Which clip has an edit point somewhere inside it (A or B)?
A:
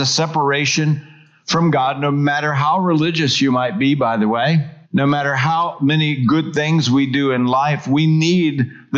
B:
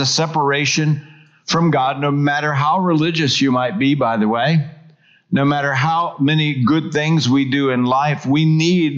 A